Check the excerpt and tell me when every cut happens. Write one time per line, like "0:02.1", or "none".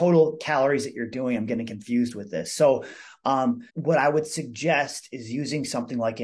0:03.7